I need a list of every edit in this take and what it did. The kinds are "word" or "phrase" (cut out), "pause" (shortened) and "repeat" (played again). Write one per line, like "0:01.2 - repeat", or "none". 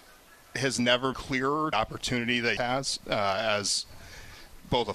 0:01.1 - word
0:01.7 - phrase
0:02.6 - word